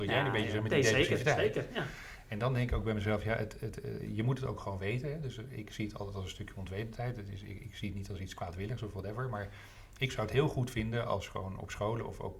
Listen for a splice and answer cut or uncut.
uncut